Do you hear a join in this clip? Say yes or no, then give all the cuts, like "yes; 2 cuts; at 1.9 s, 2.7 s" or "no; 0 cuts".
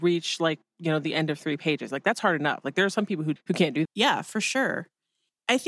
yes; 2 cuts; at 3.4 s, 3.8 s